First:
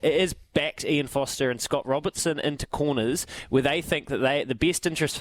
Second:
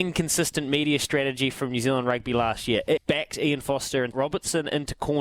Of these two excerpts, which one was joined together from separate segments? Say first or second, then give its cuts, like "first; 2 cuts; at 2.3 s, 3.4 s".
second; 2 cuts; at 3.0 s, 4.1 s